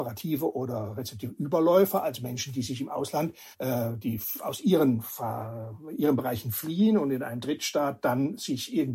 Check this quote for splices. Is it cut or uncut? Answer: cut